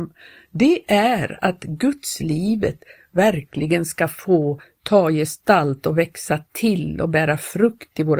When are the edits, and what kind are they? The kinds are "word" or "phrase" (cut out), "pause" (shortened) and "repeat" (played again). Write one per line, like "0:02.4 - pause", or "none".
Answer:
none